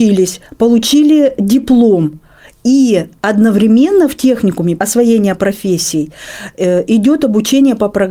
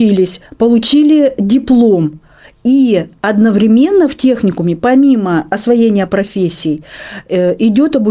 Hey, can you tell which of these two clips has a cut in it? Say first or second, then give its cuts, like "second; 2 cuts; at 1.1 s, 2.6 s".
first; 1 cut; at 4.8 s